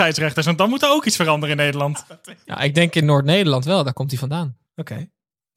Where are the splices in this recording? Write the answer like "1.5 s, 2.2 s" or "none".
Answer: 4.7 s